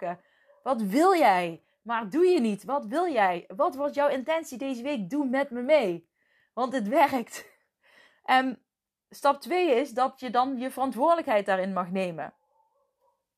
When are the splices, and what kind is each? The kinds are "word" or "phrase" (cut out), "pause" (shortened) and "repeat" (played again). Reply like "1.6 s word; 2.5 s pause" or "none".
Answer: none